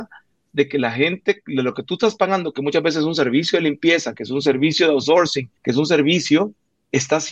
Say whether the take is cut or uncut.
cut